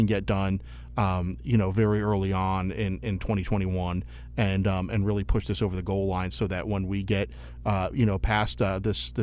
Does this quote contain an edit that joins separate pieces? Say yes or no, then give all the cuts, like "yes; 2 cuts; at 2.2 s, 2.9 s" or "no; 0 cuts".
no; 0 cuts